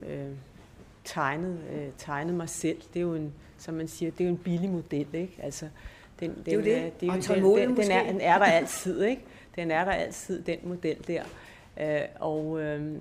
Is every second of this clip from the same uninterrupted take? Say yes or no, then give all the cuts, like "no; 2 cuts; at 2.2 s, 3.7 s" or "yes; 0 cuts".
yes; 0 cuts